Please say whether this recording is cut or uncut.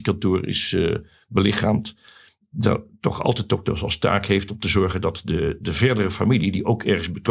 uncut